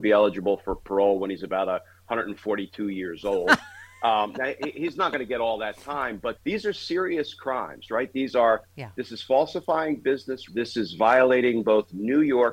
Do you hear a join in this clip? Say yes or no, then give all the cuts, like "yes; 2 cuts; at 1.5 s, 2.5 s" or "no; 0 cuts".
yes; 2 cuts; at 6.4 s, 10.5 s